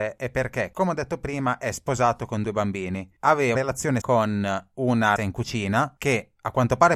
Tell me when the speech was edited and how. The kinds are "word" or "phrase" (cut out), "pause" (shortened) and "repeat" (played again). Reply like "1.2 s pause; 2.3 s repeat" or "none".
3.5 s word; 4.0 s word; 5.2 s word